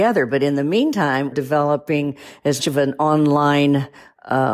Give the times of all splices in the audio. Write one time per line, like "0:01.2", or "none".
0:01.3
0:02.6

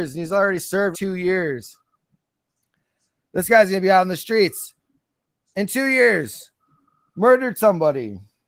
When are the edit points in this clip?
0:00.9

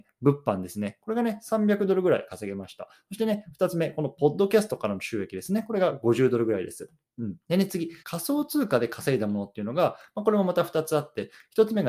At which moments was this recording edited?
0:07.4
0:08.0

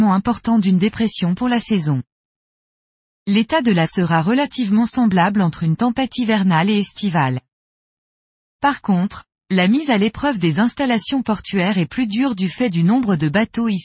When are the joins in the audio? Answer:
0:03.8

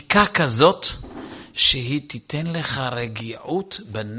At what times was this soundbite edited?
none

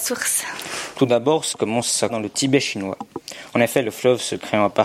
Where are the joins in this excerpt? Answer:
0:01.5
0:02.1

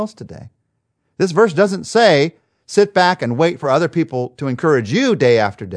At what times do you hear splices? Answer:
none

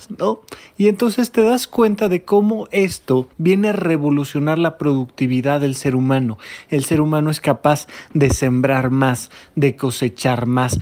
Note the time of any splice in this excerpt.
0:03.3

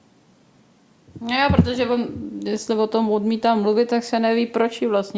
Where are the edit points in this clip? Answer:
none

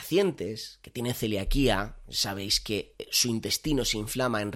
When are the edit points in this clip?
none

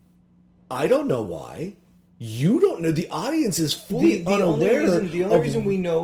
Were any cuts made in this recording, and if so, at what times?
none

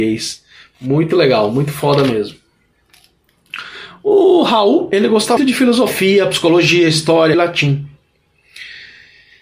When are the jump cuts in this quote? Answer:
0:05.4
0:07.3

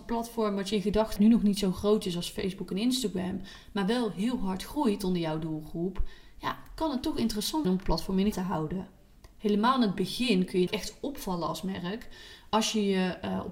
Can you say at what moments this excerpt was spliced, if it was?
0:01.2
0:07.6
0:08.3
0:10.7

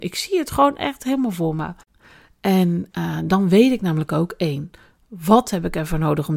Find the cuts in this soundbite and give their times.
none

